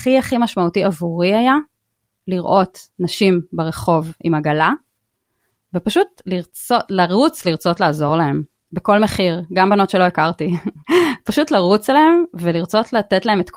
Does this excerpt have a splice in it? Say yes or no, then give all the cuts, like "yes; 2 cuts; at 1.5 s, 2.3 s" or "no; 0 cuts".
no; 0 cuts